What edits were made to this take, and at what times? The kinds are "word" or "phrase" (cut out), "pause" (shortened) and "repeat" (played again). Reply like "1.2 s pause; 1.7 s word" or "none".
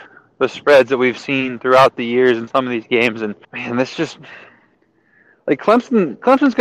3.4 s pause

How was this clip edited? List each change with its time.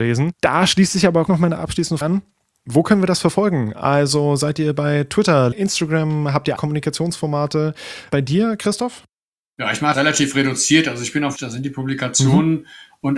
1.3 s word; 2.0 s word; 5.5 s word; 6.6 s word; 9.9 s word; 11.4 s word

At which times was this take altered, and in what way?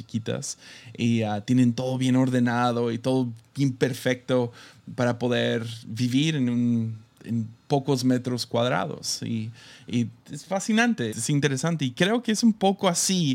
10.2 s pause; 11.1 s word

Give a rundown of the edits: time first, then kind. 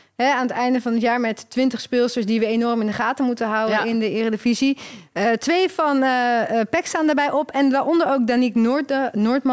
none

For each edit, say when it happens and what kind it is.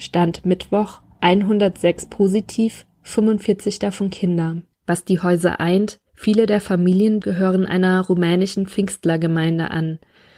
4.7 s pause; 6.1 s pause; 7.2 s word

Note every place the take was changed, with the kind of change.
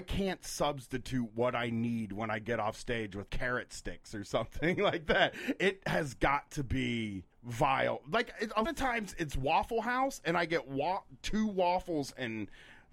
3.3 s word; 7.3 s pause; 8.7 s word; 11.2 s word

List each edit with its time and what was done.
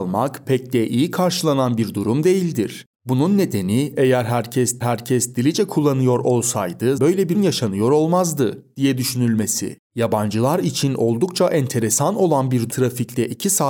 2.9 s pause; 4.8 s repeat; 7.0 s word; 7.3 s word; 9.8 s pause; 12.7 s word

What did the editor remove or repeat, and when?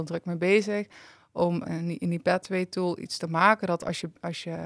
1.6 s word

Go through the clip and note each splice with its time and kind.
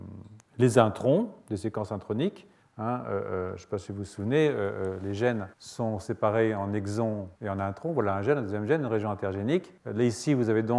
2.6 s pause; 5.5 s pause; 7.4 s pause; 9.8 s pause

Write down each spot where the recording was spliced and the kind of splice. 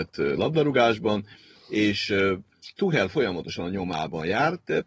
none

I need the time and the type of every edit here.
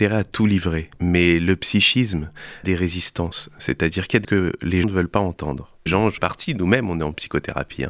0.9 s pause; 2.6 s word; 4.2 s word; 4.8 s word; 5.9 s word; 6.2 s word

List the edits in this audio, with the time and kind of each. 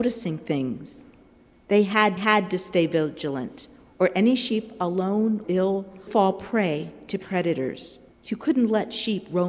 2.2 s repeat; 5.4 s word; 6.1 s word; 8.1 s pause

